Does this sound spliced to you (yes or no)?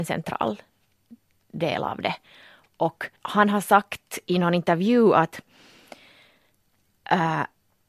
yes